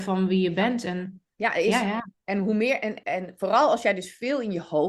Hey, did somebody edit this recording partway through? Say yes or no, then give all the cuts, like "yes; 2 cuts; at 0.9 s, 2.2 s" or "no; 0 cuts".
yes; 3 cuts; at 1.3 s, 2.1 s, 3.0 s